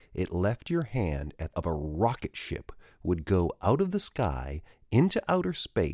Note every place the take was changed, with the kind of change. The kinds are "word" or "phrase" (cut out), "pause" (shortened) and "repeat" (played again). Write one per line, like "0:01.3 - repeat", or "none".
0:01.5 - phrase